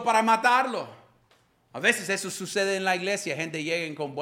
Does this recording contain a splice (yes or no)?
no